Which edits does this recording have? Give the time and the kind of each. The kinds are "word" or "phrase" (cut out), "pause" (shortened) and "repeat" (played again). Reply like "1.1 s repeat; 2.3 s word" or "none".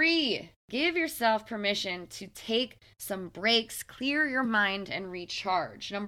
none